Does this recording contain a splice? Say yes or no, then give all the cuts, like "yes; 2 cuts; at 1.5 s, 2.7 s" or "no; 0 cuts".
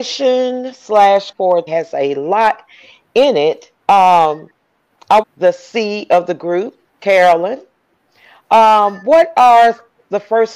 yes; 5 cuts; at 1.3 s, 1.7 s, 3.8 s, 5.2 s, 6.9 s